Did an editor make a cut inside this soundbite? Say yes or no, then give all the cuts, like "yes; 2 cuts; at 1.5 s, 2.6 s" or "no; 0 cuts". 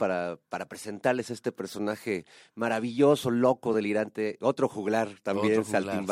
no; 0 cuts